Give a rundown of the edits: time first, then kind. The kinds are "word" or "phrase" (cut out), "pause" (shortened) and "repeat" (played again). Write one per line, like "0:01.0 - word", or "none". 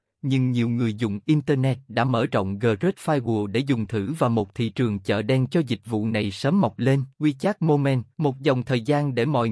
0:07.1 - pause
0:08.1 - pause